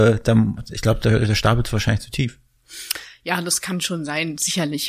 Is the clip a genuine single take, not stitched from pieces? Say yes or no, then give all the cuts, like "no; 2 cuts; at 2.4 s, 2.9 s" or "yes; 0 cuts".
yes; 0 cuts